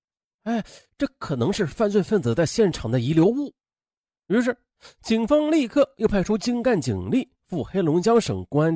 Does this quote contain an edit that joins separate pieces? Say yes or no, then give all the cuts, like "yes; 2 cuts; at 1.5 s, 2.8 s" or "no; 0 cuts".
no; 0 cuts